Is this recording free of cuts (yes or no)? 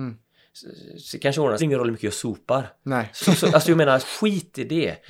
no